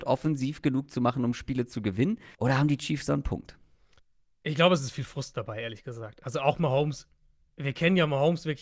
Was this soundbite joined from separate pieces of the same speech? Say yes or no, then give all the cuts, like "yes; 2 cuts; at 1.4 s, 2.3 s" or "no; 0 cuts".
yes; 2 cuts; at 2.3 s, 4.0 s